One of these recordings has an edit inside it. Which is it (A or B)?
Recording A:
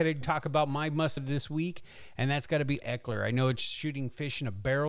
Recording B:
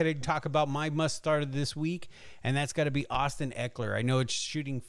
A